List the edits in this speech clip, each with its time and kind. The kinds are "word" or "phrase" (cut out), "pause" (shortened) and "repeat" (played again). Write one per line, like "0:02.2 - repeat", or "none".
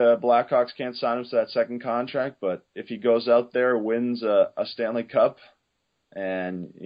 none